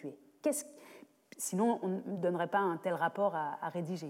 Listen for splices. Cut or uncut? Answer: uncut